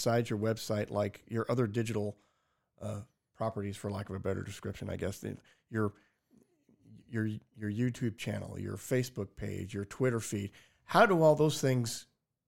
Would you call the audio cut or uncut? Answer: uncut